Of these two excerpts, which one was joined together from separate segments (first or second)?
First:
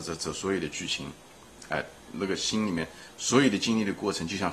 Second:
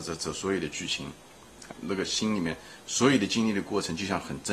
second